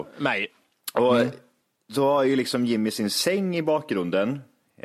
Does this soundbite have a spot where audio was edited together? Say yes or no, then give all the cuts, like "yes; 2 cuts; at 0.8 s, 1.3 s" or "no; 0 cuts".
no; 0 cuts